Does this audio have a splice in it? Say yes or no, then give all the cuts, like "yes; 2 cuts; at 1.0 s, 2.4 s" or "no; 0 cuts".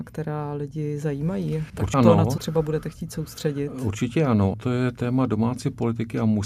yes; 3 cuts; at 1.9 s, 2.4 s, 4.5 s